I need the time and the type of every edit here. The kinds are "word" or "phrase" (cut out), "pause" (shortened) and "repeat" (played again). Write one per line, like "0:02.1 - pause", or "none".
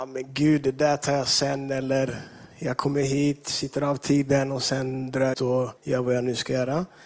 0:02.5 - pause
0:05.3 - word
0:05.8 - pause